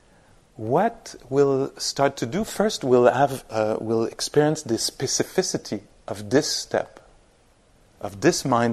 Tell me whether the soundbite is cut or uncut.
uncut